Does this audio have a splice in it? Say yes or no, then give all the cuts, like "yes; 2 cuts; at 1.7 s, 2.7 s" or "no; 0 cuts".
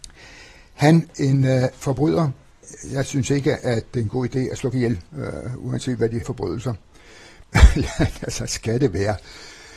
yes; 5 cuts; at 1.1 s, 3.9 s, 4.7 s, 5.1 s, 6.2 s